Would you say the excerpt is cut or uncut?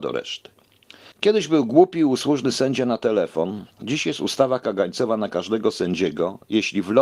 cut